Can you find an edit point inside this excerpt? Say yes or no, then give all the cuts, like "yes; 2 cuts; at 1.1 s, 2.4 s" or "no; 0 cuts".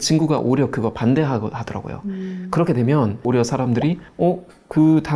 no; 0 cuts